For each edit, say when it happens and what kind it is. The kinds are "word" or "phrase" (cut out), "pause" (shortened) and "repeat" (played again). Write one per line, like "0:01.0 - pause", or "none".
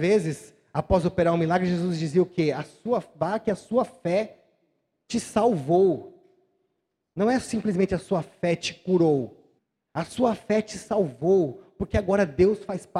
0:09.6 - pause